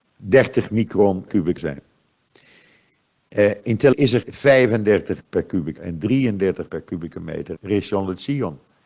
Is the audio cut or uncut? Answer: cut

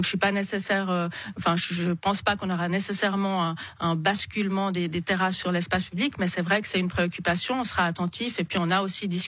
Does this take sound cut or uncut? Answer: uncut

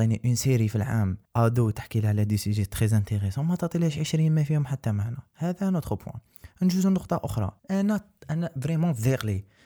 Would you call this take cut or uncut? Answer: cut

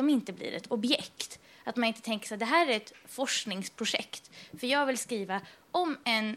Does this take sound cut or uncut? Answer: uncut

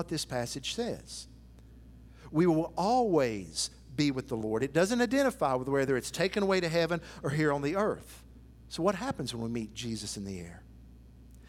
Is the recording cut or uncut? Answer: cut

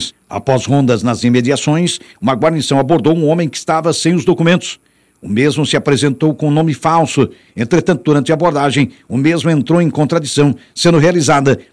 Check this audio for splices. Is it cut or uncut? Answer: uncut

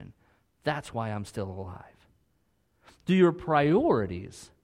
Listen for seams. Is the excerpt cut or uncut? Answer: uncut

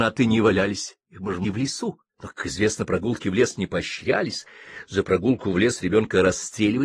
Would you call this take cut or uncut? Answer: cut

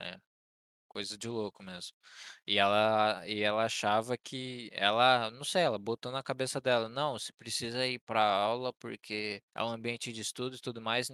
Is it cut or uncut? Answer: cut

